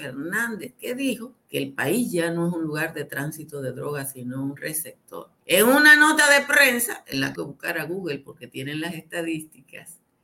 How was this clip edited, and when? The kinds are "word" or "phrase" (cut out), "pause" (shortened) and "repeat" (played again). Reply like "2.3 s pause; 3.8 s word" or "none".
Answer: 1.4 s pause; 5.4 s pause; 7.3 s phrase